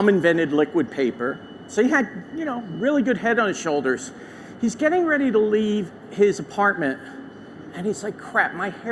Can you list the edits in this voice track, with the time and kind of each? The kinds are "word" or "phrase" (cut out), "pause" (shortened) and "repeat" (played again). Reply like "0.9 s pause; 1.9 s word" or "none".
none